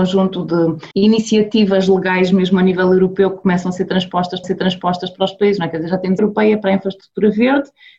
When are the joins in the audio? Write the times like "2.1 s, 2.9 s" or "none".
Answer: 0.9 s, 4.4 s, 6.2 s